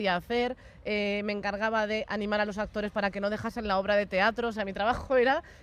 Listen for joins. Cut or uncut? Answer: uncut